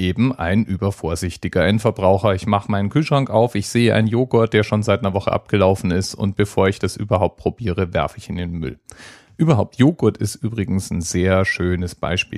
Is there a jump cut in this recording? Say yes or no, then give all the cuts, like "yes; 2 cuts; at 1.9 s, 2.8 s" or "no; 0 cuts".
no; 0 cuts